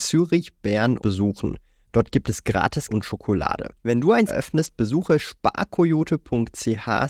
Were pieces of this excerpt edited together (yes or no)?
yes